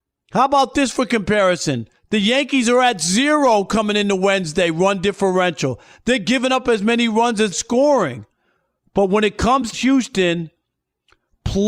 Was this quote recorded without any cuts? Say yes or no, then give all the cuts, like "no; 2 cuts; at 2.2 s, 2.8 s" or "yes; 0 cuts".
no; 3 cuts; at 2.0 s, 7.5 s, 9.7 s